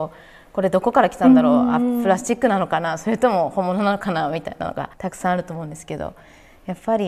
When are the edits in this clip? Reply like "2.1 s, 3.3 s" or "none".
4.9 s